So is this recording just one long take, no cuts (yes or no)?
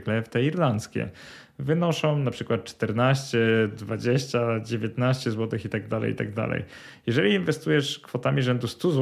yes